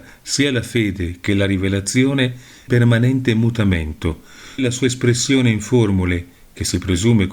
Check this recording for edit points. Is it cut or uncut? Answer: cut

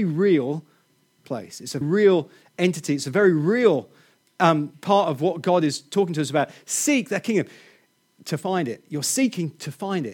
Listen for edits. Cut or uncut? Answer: cut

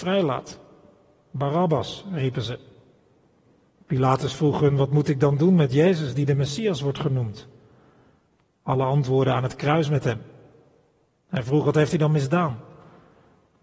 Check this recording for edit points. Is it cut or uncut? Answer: uncut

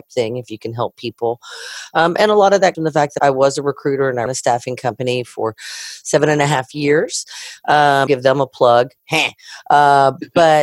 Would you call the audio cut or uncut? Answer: cut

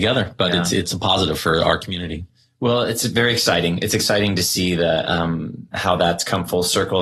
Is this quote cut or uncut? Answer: uncut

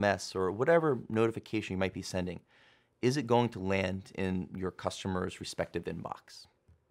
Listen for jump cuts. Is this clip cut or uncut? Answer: uncut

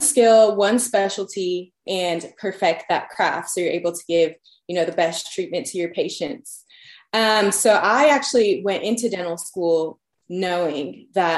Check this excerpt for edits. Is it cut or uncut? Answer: uncut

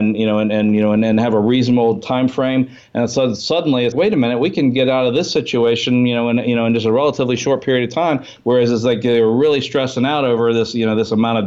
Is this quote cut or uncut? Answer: cut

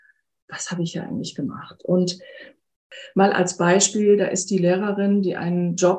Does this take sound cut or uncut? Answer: uncut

